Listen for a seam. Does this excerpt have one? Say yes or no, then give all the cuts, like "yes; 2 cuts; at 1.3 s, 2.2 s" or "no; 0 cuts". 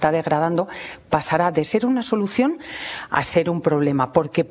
no; 0 cuts